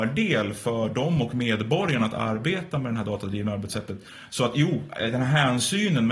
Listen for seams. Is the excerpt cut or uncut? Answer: uncut